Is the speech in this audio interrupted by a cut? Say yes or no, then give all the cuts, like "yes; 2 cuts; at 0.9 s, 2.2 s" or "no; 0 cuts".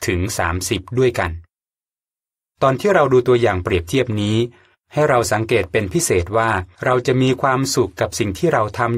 yes; 1 cut; at 6.7 s